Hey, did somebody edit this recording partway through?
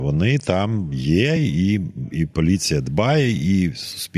no; 0 cuts

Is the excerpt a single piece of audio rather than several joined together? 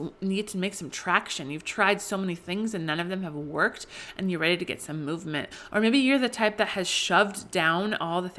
yes; 0 cuts

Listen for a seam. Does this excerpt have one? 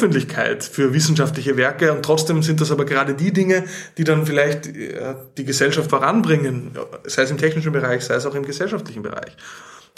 yes; 1 cut; at 5.9 s

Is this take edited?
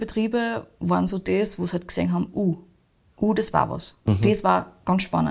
no; 0 cuts

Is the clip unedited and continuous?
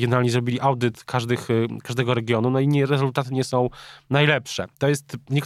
yes; 0 cuts

